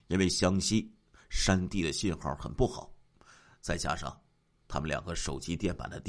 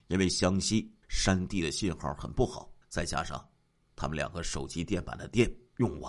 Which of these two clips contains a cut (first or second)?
second